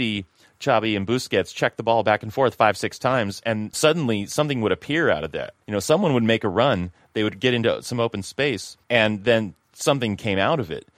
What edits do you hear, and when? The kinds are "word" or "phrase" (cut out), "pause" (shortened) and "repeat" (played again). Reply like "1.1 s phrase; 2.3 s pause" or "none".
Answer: 3.7 s word; 5.6 s pause; 8.8 s pause